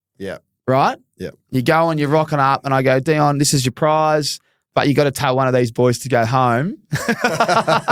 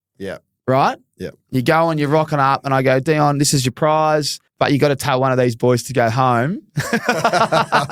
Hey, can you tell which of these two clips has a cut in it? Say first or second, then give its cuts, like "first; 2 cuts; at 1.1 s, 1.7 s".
second; 1 cut; at 4.5 s